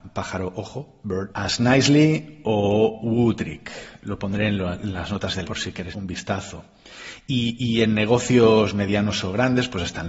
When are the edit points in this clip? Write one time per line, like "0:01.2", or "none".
0:01.3
0:05.4
0:05.9

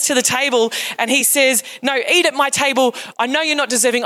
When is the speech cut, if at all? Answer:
none

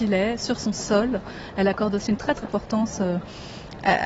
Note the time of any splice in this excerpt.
0:02.4

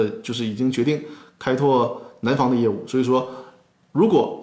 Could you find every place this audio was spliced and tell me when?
none

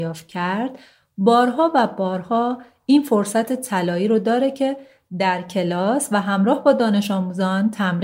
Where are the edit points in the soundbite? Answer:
none

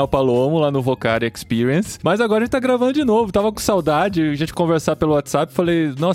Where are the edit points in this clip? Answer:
0:04.5

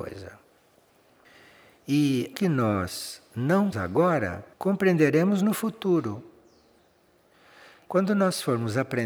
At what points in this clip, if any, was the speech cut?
0:02.3
0:03.7
0:04.5

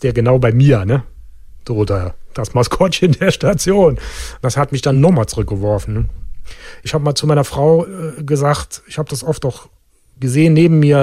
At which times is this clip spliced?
none

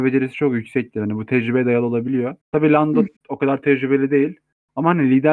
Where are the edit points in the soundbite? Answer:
0:02.4
0:03.2

